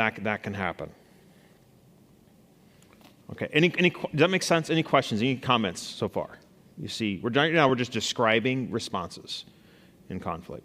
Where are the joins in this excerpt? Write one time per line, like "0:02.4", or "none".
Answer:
none